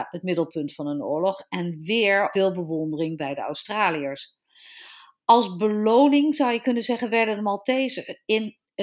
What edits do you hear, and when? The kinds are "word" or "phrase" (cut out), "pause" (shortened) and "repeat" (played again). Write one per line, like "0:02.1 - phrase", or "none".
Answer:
0:02.3 - phrase

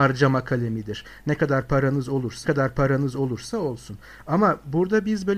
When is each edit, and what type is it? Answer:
0:02.4 - repeat

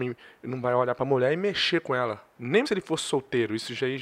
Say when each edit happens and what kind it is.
0:02.6 - word

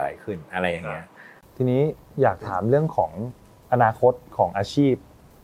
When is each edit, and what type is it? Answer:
none

